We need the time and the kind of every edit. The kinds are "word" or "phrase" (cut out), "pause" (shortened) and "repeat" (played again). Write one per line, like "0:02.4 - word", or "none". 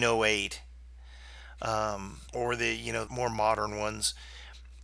0:02.3 - pause
0:03.1 - word